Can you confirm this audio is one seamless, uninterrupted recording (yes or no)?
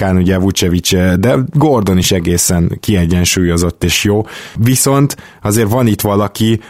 yes